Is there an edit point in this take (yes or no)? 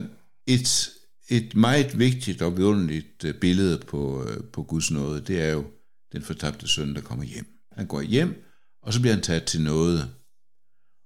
no